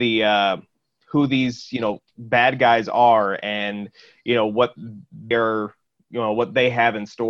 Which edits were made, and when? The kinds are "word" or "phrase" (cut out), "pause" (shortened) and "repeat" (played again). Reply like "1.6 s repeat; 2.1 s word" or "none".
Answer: 5.3 s word